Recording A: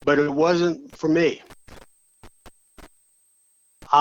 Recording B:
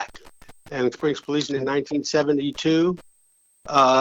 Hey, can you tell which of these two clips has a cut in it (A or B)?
B